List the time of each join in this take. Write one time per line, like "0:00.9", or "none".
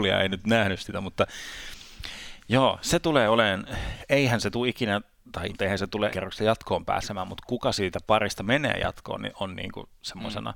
0:05.5
0:06.1